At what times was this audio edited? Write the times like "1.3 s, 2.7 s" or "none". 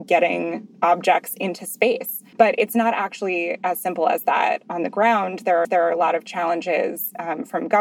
2.3 s, 5.6 s